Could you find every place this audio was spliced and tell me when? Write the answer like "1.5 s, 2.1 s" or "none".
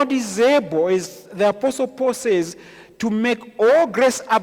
none